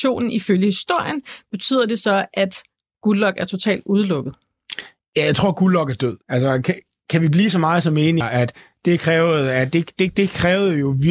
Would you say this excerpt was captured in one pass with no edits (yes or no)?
no